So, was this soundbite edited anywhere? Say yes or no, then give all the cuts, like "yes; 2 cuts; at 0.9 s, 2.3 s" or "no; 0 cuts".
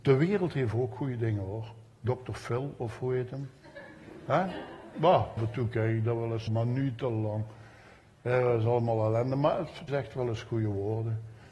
yes; 3 cuts; at 5.4 s, 6.5 s, 9.9 s